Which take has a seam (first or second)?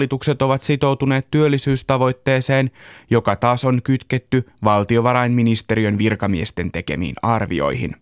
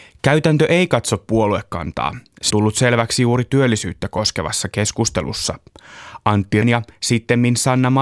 second